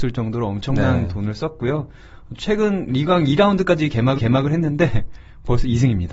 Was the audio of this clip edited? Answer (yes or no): yes